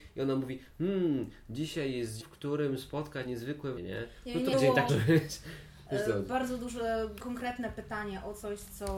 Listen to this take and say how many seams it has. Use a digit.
6